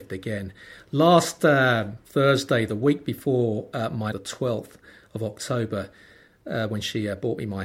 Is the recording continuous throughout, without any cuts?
no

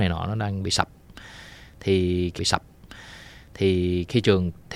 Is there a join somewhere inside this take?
yes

